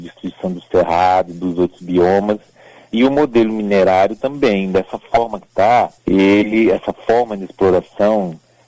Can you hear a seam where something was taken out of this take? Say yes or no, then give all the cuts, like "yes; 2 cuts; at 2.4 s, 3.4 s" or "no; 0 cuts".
yes; 1 cut; at 6.0 s